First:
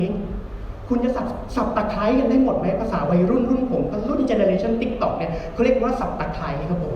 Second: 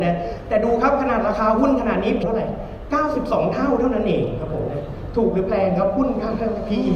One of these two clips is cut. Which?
second; 1 cut; at 2.2 s

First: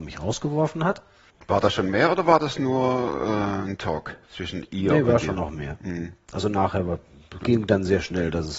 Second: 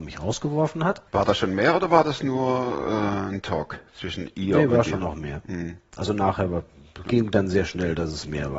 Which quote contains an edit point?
second; 1 cut; at 1.1 s

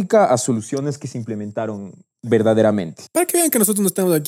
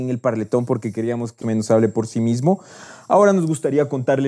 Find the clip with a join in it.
second; 1 cut; at 1.4 s

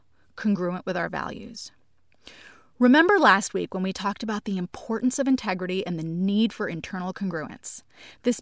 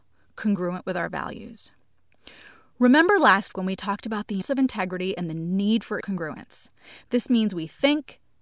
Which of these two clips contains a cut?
second; 3 cuts; at 3.5 s, 4.4 s, 6.0 s

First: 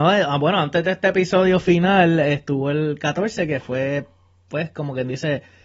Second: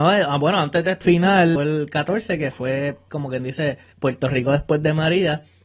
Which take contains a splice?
second; 4 cuts; at 1.0 s, 1.6 s, 3.1 s, 3.9 s

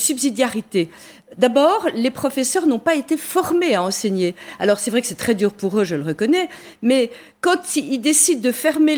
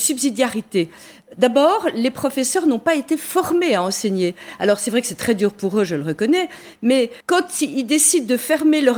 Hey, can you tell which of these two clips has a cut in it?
second; 1 cut; at 7.2 s

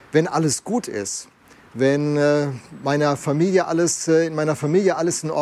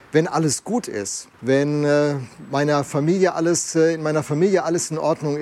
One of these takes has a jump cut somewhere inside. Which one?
second; 1 cut; at 1.3 s

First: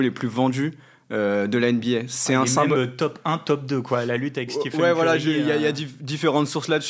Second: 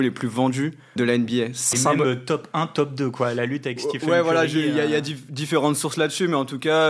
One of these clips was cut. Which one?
second; 2 cuts; at 1.0 s, 1.7 s

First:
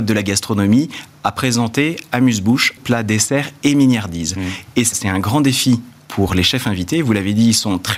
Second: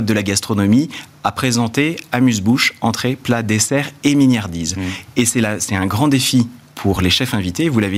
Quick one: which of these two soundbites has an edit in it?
first; 2 cuts; at 2.8 s, 4.9 s

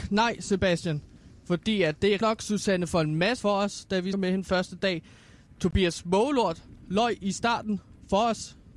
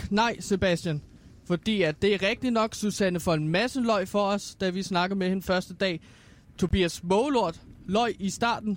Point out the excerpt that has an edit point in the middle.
first; 3 cuts; at 2.2 s, 3.4 s, 4.1 s

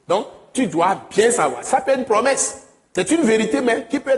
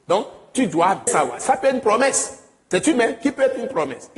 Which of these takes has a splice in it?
second; 2 cuts; at 1.1 s, 2.9 s

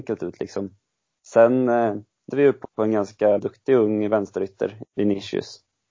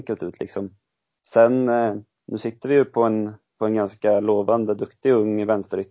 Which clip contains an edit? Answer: first; 4 cuts; at 2.3 s, 2.6 s, 3.4 s, 4.8 s

